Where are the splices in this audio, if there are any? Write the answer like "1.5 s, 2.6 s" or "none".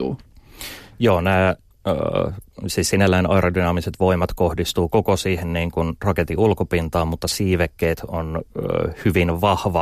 none